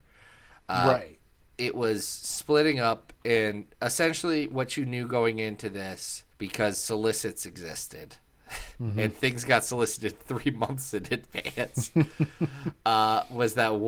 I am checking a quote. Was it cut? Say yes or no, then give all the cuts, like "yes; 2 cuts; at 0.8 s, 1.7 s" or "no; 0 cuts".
yes; 3 cuts; at 1.4 s, 3.1 s, 6.3 s